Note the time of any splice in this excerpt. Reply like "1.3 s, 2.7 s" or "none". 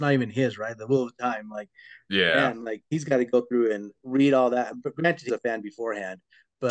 5.3 s